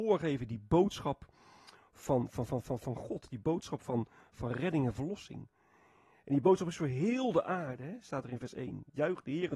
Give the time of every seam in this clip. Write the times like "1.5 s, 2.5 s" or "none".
none